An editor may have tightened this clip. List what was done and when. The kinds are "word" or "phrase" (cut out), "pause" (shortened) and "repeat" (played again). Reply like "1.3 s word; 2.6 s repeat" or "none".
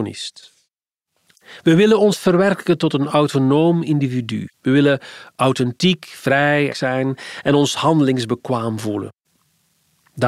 4.5 s pause; 6.7 s phrase